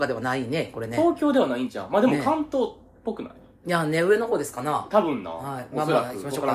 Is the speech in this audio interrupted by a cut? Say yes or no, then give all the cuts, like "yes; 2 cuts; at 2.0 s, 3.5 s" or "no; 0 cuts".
no; 0 cuts